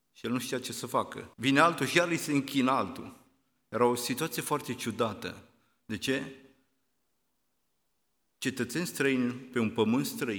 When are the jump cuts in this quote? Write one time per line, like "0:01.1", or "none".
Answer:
0:01.3